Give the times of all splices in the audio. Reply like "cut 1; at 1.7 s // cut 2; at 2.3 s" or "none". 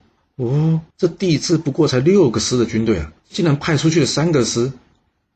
cut 1; at 0.9 s // cut 2; at 3.2 s